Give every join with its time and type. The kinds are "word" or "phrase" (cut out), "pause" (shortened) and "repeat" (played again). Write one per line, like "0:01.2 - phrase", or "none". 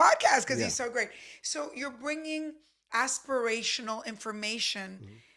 0:02.9 - word